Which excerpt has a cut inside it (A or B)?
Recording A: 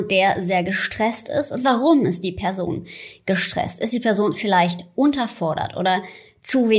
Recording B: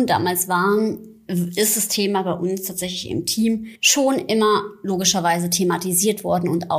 B